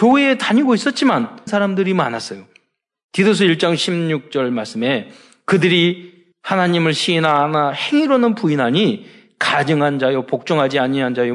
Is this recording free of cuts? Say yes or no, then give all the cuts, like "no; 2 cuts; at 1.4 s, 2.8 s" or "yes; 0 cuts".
no; 2 cuts; at 1.5 s, 6.3 s